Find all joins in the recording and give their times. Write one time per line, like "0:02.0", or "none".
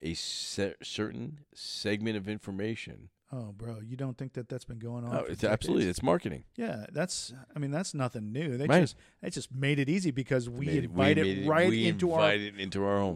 none